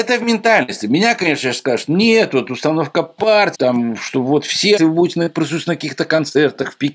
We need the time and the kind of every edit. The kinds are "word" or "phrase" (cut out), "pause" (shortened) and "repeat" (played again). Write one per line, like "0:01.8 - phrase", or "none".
0:03.5 - word
0:04.8 - phrase